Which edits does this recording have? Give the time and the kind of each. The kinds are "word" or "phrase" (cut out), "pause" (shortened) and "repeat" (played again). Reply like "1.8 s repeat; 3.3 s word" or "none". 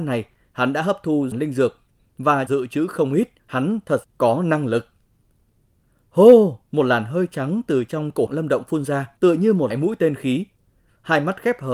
1.3 s phrase; 2.5 s phrase; 3.4 s pause; 4.0 s word; 6.6 s pause; 8.3 s word; 9.2 s pause; 9.7 s word

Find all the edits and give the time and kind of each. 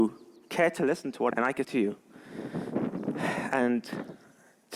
1.3 s phrase; 1.6 s word

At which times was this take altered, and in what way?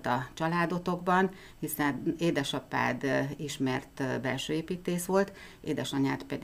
none

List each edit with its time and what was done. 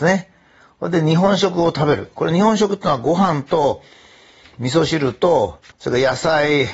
5.7 s pause

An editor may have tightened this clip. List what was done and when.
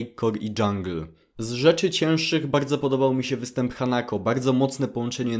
none

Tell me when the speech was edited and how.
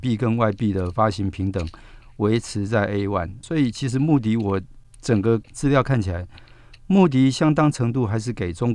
3.4 s word

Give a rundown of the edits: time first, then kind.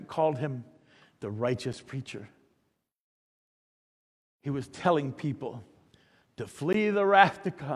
none

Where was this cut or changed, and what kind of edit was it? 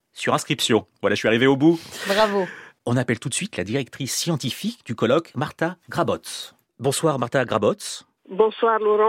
none

